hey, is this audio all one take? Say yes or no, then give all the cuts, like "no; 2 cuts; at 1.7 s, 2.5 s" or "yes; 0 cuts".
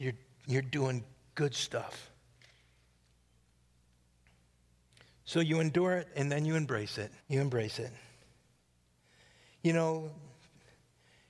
no; 1 cut; at 7.2 s